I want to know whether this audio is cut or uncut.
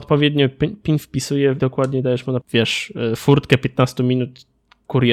cut